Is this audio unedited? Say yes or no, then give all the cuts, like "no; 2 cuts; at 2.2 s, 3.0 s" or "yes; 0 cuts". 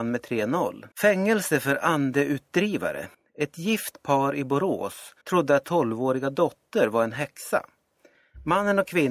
no; 4 cuts; at 0.9 s, 3.1 s, 5.2 s, 5.6 s